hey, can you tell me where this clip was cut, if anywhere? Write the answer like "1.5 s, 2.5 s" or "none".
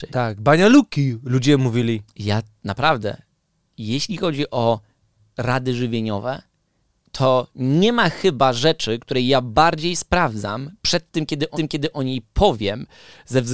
11.5 s

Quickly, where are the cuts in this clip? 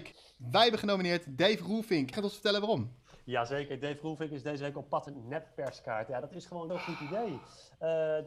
2.1 s, 5.1 s, 6.7 s

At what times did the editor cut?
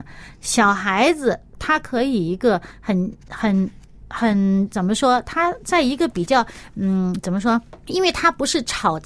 7.8 s

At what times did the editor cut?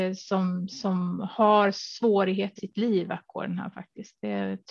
2.6 s

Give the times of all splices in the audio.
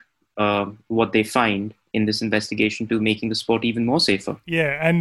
none

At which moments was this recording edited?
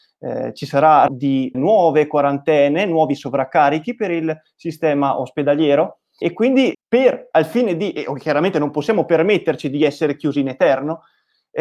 1.1 s, 1.5 s, 6.2 s, 6.7 s

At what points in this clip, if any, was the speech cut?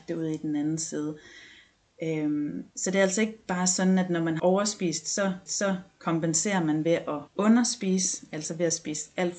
2.7 s, 4.4 s, 5.5 s, 7.3 s

